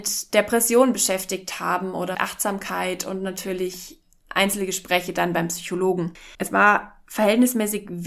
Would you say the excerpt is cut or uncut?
cut